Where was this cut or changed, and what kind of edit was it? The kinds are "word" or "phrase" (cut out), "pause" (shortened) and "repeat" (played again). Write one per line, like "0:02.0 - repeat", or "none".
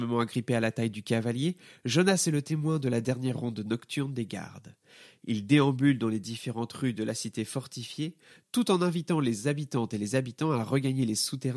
none